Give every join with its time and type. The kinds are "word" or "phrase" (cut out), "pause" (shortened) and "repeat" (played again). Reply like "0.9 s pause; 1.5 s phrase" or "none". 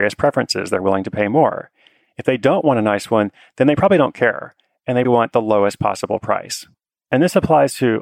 5.0 s word